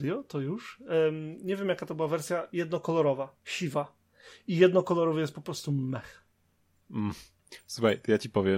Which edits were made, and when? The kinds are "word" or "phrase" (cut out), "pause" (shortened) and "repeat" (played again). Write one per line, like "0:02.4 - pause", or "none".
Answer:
0:03.4 - pause